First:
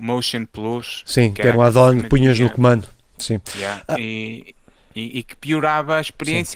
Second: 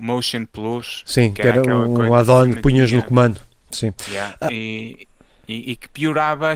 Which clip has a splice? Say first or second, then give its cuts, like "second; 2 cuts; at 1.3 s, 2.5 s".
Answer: first; 1 cut; at 1.5 s